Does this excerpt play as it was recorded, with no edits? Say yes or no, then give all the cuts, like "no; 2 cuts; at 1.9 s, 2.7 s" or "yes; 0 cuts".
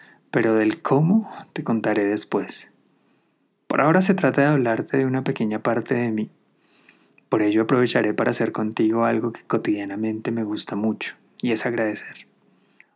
yes; 0 cuts